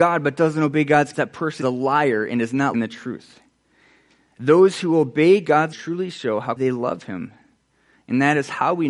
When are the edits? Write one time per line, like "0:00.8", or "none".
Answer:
0:01.1
0:01.6
0:02.7
0:05.7
0:06.6

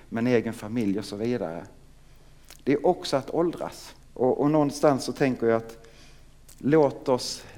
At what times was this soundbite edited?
0:04.0

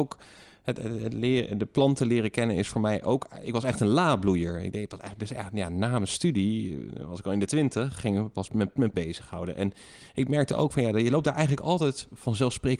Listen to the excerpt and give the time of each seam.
0:08.5
0:08.9

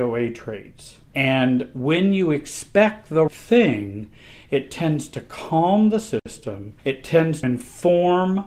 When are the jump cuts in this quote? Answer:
0:01.1
0:03.3
0:06.8
0:07.4

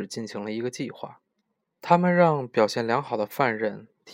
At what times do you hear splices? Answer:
0:01.5

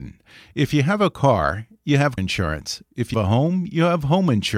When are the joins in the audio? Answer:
0:02.2
0:03.1

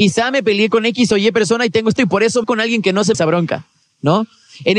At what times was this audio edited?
0:02.0
0:02.4
0:03.1

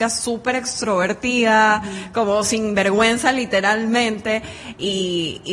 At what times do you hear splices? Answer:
none

